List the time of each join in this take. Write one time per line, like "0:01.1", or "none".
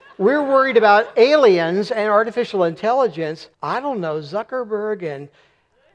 0:03.5